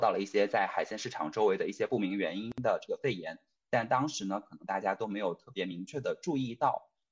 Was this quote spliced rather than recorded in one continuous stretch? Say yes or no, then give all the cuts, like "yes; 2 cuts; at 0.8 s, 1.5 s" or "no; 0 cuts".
no; 0 cuts